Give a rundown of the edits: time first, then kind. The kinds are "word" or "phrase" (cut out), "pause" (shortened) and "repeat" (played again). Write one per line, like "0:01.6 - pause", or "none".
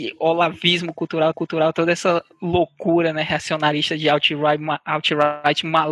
0:01.3 - repeat